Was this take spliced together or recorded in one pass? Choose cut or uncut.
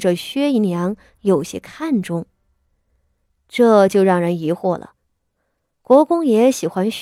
uncut